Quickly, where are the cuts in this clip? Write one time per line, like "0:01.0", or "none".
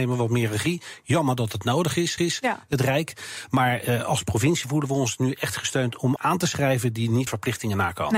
0:02.2
0:06.2
0:07.3

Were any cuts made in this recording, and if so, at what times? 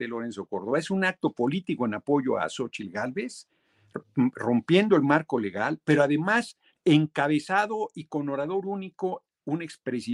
none

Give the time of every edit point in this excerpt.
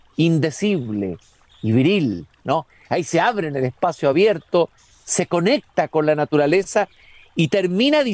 none

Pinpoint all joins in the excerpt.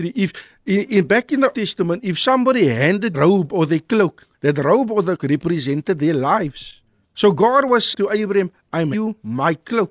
0:01.5
0:03.1
0:04.3
0:05.2
0:07.0
0:07.9
0:08.9

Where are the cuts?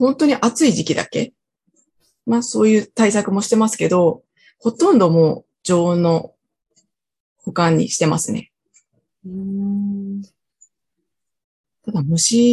none

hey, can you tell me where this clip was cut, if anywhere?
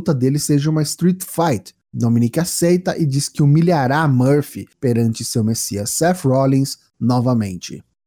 none

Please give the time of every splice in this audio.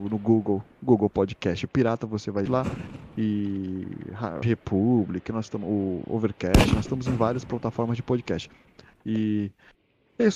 0:01.7
0:02.5
0:04.4

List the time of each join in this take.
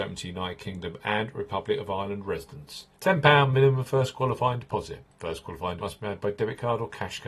0:02.9
0:05.8

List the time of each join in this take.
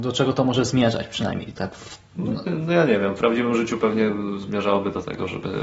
none

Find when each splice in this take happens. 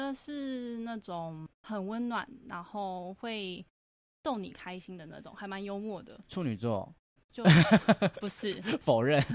0:07.2

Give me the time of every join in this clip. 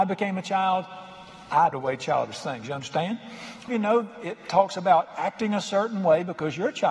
0:01.7
0:03.7

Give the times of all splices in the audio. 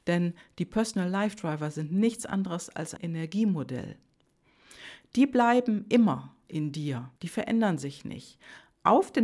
0:03.0
0:07.2

